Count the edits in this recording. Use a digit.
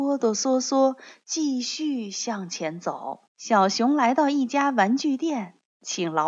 1